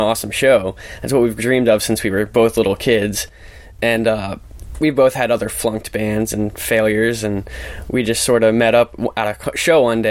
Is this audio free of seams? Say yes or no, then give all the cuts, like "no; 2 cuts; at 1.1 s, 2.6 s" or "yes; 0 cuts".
yes; 0 cuts